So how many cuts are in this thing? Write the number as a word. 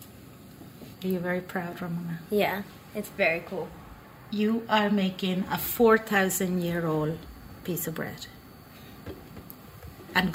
one